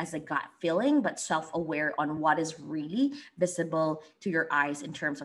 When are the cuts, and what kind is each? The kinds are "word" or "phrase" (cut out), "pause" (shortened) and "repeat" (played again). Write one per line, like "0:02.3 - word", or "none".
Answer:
none